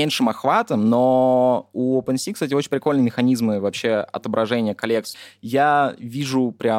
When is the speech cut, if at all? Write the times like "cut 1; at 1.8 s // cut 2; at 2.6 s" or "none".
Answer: none